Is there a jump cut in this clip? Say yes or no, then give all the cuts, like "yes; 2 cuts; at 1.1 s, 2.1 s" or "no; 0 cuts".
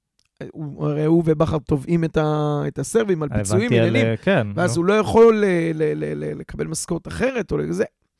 no; 0 cuts